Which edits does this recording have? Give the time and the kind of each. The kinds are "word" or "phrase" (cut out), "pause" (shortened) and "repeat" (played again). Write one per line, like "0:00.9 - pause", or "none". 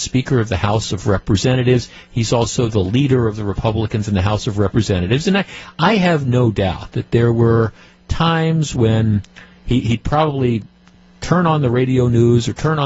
none